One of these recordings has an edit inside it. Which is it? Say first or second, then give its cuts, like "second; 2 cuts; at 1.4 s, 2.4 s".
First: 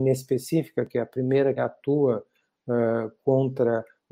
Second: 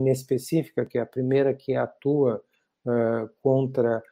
first; 1 cut; at 1.6 s